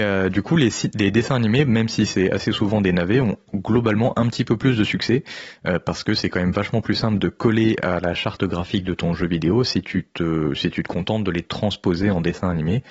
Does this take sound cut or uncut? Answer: uncut